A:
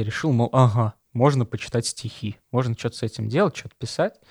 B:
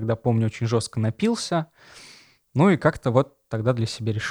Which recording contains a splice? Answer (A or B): A